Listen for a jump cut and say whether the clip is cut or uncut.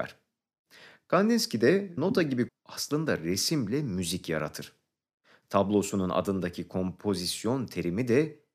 cut